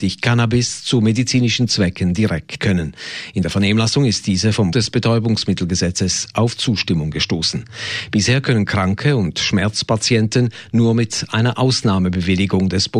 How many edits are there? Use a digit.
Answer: 2